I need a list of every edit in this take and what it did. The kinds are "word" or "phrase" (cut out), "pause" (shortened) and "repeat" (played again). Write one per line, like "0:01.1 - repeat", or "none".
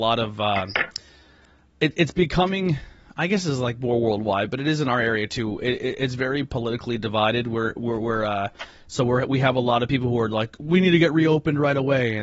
none

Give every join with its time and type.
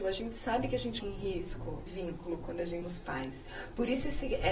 0:01.0 - word
0:01.9 - word
0:02.8 - word

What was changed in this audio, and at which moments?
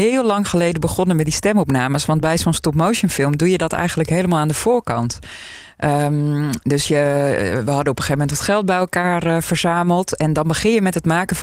none

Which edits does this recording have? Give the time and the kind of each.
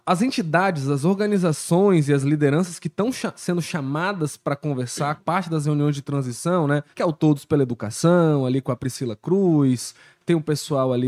0:05.2 - phrase
0:06.9 - pause

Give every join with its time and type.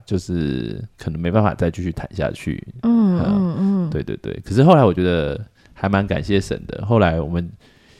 none

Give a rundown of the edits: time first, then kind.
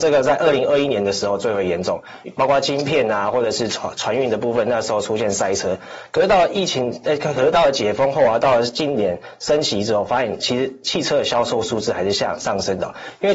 0:02.2 - pause

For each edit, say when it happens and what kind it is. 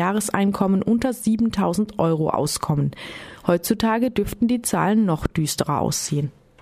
none

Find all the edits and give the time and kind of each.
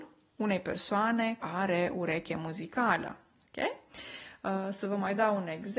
0:01.4 - word

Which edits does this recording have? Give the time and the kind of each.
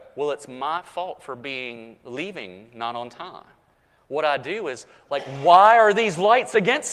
none

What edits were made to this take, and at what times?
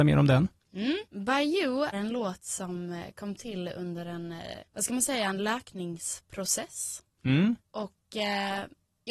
0:01.0 - pause
0:01.9 - word
0:04.6 - pause
0:07.6 - pause

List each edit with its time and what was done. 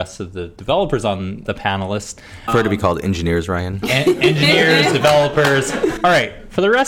0:01.5 - word

